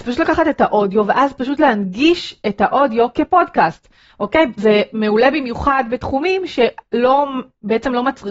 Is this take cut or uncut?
uncut